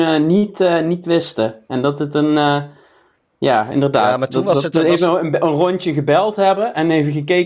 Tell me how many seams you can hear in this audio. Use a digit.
0